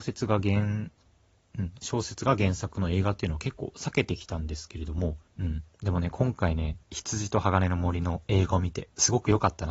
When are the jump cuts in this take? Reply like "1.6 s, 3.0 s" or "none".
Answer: 5.3 s, 6.8 s